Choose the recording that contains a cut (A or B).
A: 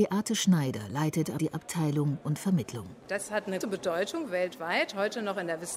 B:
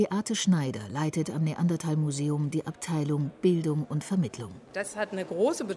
A